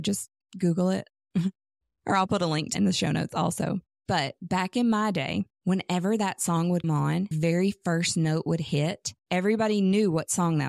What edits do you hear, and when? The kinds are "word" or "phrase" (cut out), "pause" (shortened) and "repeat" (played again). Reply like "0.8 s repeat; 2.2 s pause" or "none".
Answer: 2.7 s word; 5.6 s pause; 6.8 s word; 7.3 s word; 9.2 s pause